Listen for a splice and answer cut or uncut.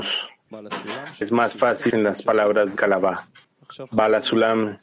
cut